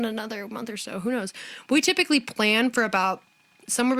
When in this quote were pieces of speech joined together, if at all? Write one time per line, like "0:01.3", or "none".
none